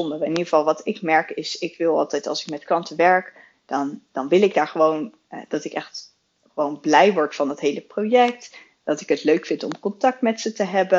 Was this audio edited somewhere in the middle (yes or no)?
no